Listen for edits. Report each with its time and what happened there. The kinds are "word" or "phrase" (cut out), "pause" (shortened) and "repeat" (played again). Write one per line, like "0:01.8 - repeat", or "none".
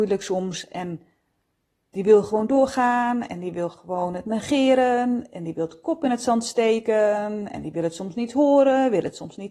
none